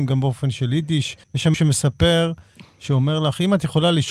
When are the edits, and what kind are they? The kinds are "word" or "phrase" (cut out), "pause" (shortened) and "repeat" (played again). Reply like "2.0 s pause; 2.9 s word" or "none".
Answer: 1.2 s pause; 1.5 s word